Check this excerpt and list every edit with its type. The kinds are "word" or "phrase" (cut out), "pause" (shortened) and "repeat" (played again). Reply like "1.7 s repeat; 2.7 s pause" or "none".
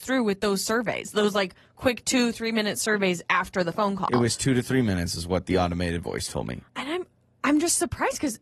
6.7 s pause

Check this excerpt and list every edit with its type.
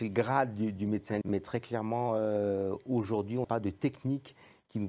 1.2 s word; 3.4 s word

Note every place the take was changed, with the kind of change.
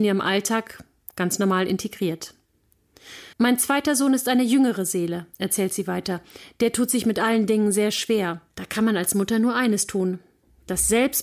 3.3 s pause; 8.5 s pause

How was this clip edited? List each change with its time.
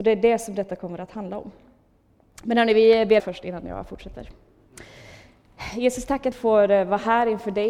3.2 s phrase; 6.3 s word

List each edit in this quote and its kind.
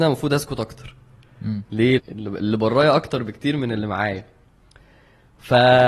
2.0 s phrase

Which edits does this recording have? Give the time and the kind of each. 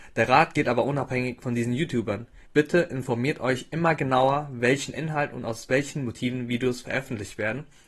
2.4 s pause

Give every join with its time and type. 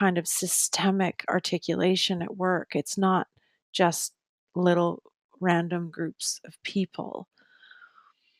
none

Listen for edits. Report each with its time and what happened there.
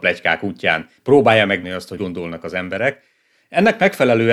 1.0 s pause; 1.6 s word; 2.0 s word

